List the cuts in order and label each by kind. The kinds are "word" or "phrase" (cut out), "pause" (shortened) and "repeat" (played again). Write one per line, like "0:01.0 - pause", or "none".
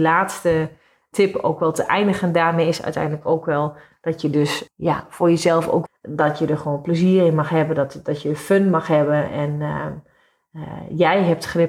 0:05.9 - phrase